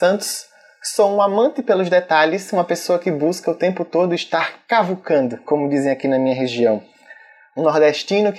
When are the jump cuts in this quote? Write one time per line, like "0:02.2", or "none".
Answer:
none

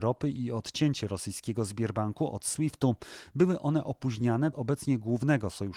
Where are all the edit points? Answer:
0:04.5

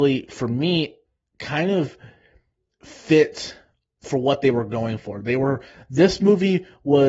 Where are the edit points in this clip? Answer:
none

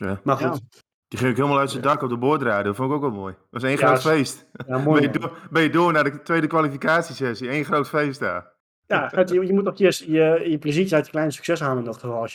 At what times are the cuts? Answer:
none

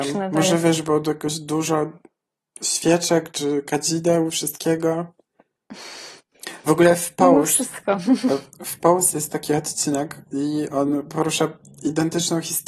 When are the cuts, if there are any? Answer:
none

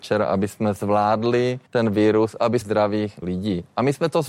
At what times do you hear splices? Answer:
0:01.7
0:02.6
0:03.2

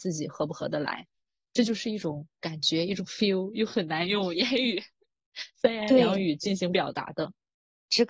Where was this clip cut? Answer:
none

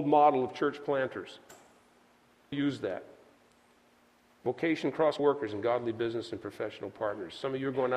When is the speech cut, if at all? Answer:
0:02.5
0:05.2

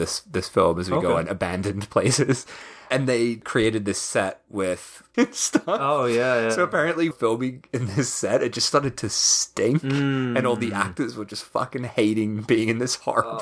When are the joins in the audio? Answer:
0:05.1
0:07.1

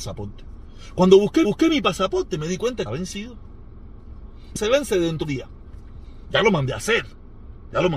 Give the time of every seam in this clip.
0:01.4
0:02.9
0:04.6
0:05.2

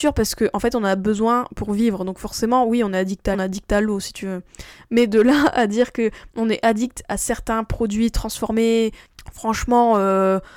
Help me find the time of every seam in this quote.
0:03.3

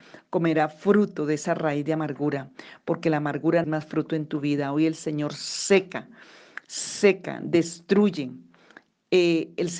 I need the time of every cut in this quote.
0:03.6

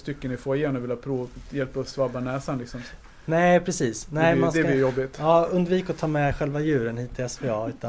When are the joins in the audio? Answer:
none

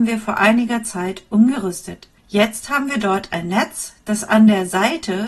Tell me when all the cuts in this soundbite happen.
0:02.2

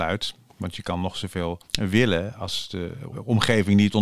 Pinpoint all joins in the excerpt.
0:01.6
0:03.1

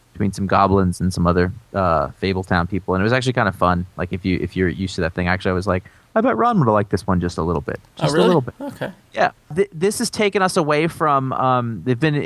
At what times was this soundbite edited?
0:01.6

